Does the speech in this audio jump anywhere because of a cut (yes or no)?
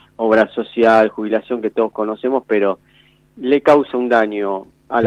no